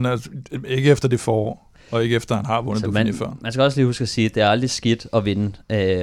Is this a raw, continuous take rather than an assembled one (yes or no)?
yes